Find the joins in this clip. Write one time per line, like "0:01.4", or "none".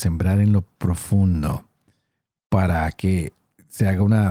none